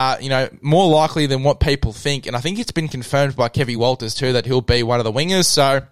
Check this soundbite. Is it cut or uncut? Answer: uncut